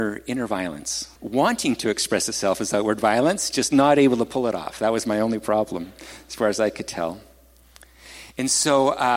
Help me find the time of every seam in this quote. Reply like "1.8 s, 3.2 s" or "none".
1.2 s